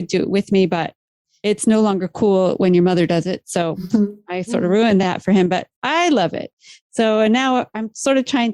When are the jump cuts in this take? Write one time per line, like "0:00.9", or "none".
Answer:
none